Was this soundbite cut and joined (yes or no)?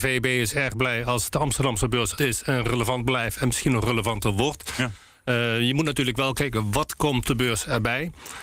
yes